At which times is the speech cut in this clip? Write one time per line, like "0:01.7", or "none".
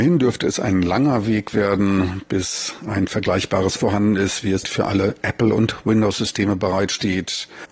0:03.8
0:04.6